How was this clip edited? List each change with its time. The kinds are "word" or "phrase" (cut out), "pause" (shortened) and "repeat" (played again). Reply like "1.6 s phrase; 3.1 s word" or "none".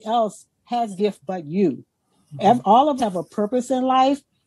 1.0 s word; 3.0 s word